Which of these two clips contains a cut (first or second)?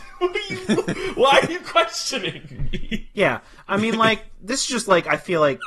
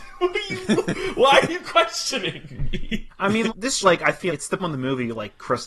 second